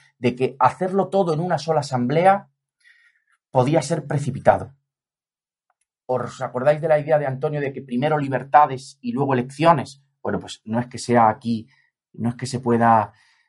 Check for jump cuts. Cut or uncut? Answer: uncut